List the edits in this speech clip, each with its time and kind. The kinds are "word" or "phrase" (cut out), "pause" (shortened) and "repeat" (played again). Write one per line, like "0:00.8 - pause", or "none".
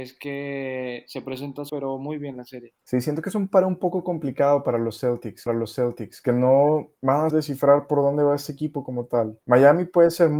0:01.7 - word
0:02.8 - pause
0:05.5 - repeat
0:07.0 - pause
0:07.3 - word
0:09.4 - pause